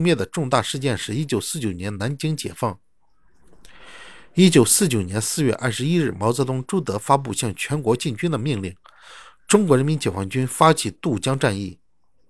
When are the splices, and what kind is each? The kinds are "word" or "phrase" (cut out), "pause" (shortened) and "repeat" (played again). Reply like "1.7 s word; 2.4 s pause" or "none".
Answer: none